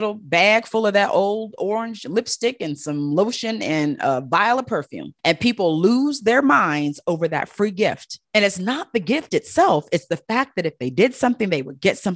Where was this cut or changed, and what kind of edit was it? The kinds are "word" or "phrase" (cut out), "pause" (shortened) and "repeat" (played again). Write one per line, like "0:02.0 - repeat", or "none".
0:05.2 - pause
0:08.2 - pause